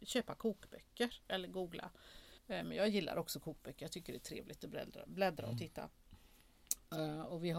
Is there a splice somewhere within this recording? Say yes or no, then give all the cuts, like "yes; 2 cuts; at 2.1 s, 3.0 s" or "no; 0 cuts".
yes; 1 cut; at 2.4 s